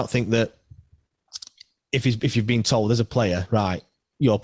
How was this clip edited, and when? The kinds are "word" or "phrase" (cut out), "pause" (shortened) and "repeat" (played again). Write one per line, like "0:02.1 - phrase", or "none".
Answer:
none